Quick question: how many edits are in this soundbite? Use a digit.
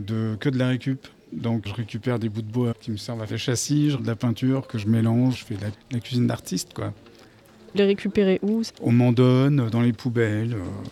8